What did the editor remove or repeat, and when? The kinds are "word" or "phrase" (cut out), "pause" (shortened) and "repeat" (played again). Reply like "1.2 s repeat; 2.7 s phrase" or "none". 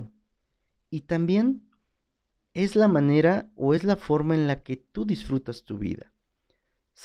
none